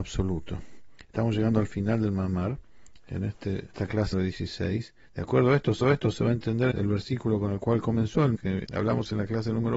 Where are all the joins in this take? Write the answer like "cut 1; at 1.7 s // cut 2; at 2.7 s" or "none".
cut 1; at 3.7 s // cut 2; at 4.1 s // cut 3; at 5.0 s // cut 4; at 5.8 s // cut 5; at 6.7 s // cut 6; at 8.3 s // cut 7; at 8.6 s